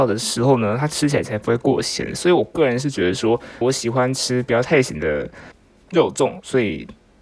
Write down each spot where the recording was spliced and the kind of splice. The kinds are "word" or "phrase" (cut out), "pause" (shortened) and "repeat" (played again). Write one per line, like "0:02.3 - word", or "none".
0:03.6 - word